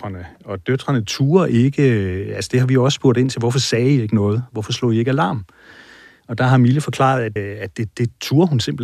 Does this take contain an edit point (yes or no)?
yes